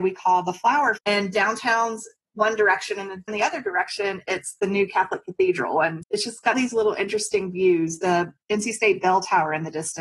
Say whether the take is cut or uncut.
cut